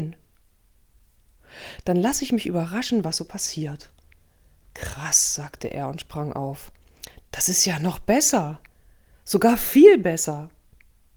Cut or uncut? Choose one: uncut